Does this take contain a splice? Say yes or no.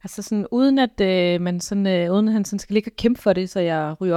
no